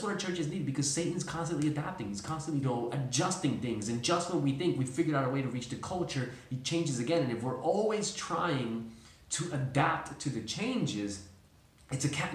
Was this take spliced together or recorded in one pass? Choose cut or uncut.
cut